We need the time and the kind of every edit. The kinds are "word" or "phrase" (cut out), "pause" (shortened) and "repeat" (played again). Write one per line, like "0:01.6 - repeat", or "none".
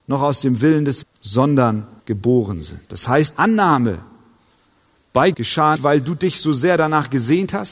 0:01.0 - word
0:02.0 - phrase
0:02.8 - pause
0:03.3 - word
0:05.3 - word
0:05.8 - word